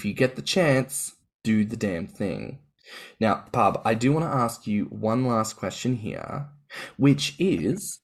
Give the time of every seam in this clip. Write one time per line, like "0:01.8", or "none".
0:01.2